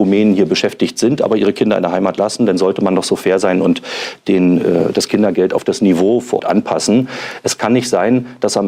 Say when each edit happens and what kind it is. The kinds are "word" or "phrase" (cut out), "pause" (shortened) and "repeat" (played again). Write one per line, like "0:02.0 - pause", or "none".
0:06.4 - word